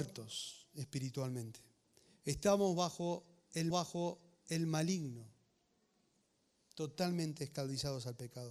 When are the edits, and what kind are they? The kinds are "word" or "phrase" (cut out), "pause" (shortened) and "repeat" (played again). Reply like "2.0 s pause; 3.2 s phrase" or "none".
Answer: 3.7 s repeat